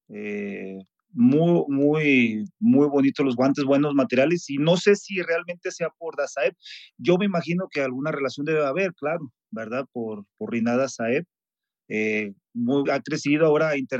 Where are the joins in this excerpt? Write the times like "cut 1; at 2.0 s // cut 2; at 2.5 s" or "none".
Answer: cut 1; at 12.9 s